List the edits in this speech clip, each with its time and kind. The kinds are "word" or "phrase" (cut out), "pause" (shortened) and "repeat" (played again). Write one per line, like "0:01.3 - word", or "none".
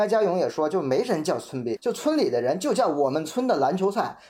0:01.8 - word

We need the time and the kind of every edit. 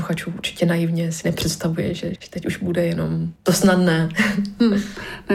0:02.1 - word
0:03.4 - pause

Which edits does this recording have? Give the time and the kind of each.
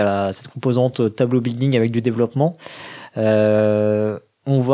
none

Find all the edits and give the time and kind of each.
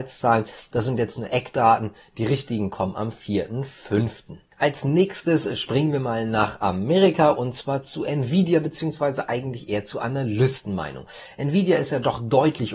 none

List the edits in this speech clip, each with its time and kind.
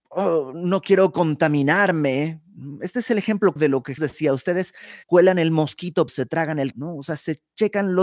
0:03.6 - word
0:04.0 - word
0:05.0 - word
0:06.1 - word
0:06.7 - word

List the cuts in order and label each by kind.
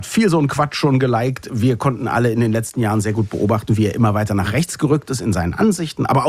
none

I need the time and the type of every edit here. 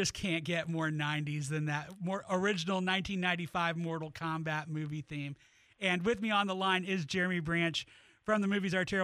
none

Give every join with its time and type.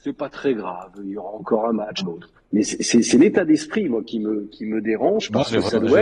0:02.0 - phrase
0:02.5 - pause

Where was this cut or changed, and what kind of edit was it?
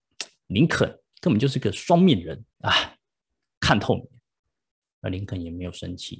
0:02.5 - pause

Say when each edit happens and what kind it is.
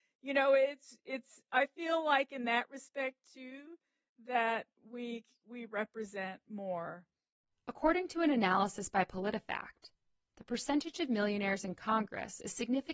none

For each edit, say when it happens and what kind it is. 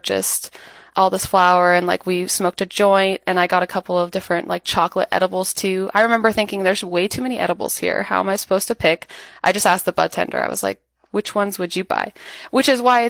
none

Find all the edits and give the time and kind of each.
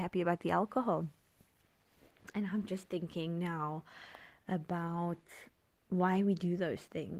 0:05.6 - pause

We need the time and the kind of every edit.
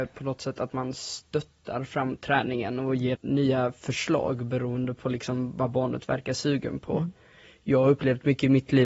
0:03.1 - word

